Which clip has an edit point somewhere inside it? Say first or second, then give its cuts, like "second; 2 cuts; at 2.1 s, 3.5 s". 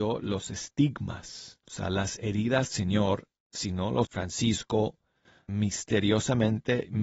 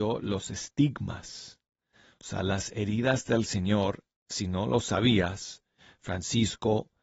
first; 4 cuts; at 1.6 s, 2.7 s, 4.0 s, 5.5 s